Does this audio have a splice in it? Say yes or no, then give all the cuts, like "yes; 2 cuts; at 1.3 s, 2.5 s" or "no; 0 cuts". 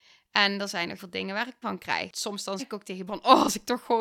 yes; 4 cuts; at 1.0 s, 1.6 s, 2.6 s, 3.1 s